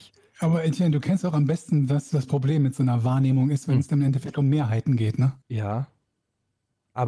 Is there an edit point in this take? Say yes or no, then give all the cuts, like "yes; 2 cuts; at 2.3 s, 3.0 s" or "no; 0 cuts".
yes; 1 cut; at 5.4 s